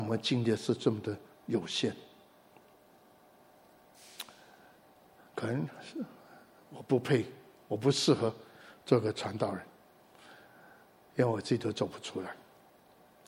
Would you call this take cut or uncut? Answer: uncut